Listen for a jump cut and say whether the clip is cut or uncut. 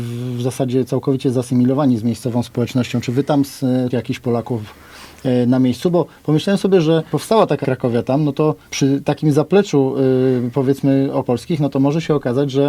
cut